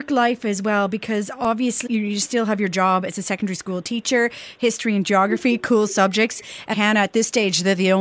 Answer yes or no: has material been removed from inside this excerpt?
yes